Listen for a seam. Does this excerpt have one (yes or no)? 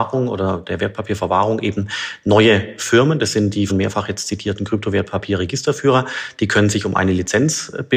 yes